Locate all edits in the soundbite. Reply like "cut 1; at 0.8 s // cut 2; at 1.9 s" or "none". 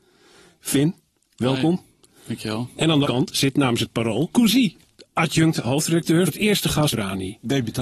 cut 1; at 3.0 s // cut 2; at 4.3 s // cut 3; at 6.3 s // cut 4; at 6.9 s